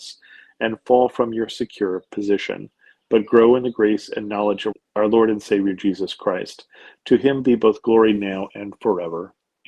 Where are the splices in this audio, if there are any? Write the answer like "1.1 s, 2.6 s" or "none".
none